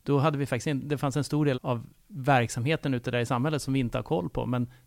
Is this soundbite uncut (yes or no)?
no